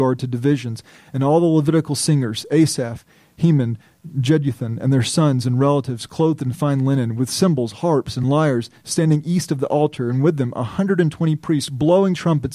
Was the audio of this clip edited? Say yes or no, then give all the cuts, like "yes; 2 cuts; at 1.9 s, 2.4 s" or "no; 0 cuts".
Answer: no; 0 cuts